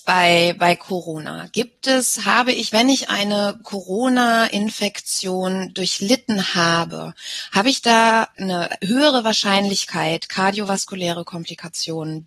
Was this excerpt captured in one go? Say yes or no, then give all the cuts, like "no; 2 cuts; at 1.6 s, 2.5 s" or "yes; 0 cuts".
yes; 0 cuts